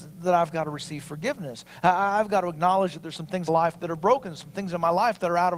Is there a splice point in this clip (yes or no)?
yes